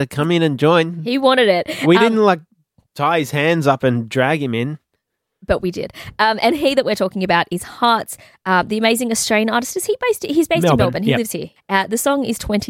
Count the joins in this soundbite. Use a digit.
0